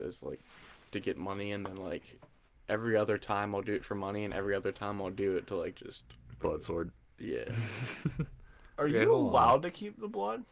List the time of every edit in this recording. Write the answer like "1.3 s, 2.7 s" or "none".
none